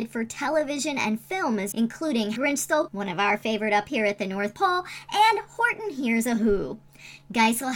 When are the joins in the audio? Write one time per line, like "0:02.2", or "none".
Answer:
0:01.7
0:02.4
0:02.9